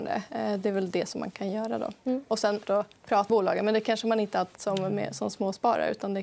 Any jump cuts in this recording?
yes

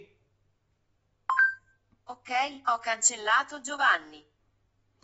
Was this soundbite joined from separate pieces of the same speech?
no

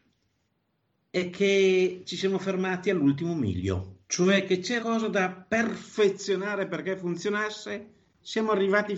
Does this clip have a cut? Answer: yes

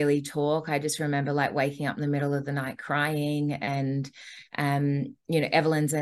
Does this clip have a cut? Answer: no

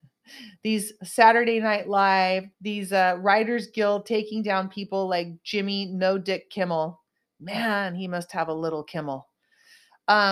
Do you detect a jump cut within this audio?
yes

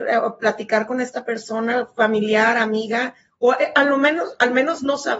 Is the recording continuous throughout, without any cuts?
yes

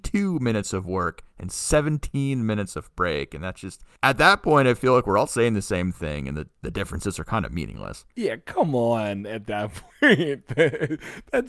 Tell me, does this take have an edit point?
yes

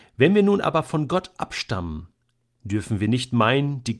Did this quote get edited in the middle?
no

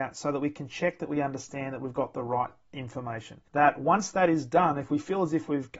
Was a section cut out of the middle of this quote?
yes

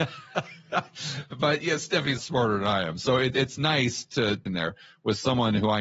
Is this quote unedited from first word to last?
no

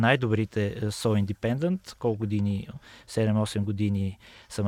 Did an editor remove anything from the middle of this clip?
no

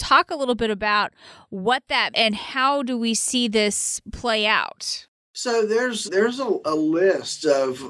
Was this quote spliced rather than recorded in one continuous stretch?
yes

